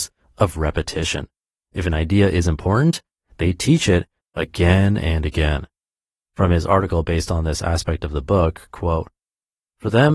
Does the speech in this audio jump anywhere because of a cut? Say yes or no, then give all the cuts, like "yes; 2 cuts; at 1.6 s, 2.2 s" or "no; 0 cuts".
no; 0 cuts